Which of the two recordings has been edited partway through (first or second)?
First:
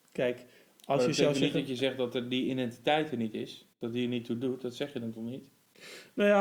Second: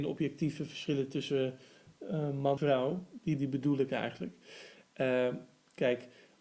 second